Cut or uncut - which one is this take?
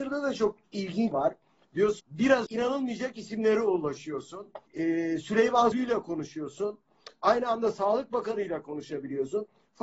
cut